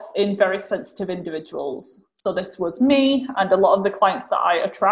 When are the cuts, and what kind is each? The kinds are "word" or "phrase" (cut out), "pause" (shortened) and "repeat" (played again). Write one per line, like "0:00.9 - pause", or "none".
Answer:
none